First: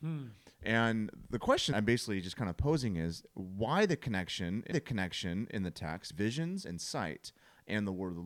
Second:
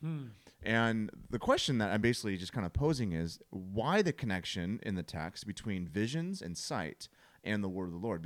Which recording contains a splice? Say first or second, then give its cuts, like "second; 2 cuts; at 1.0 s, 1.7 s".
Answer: first; 3 cuts; at 1.7 s, 4.7 s, 6.1 s